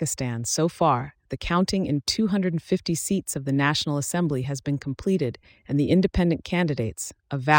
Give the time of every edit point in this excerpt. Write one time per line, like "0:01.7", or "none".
none